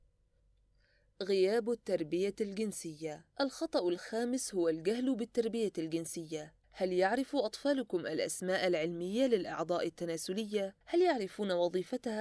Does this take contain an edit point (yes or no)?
yes